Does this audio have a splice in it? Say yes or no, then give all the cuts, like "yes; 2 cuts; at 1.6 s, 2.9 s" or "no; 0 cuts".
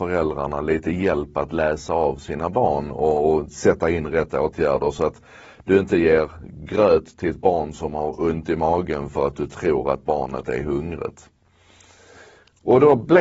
no; 0 cuts